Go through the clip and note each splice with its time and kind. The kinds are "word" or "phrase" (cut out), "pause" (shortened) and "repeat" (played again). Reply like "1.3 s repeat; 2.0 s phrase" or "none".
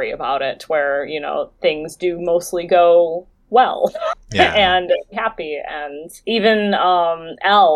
5.1 s phrase; 6.2 s pause